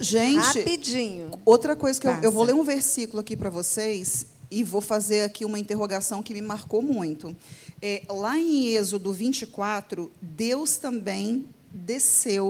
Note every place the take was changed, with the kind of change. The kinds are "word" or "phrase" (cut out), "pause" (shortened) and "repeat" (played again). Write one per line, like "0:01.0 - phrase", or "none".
none